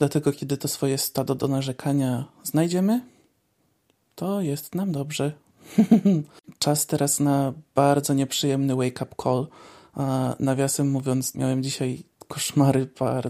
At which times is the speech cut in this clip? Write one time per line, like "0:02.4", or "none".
0:11.3